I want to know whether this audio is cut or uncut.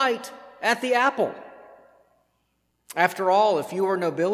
uncut